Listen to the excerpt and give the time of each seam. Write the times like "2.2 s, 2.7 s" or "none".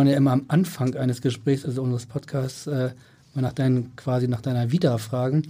none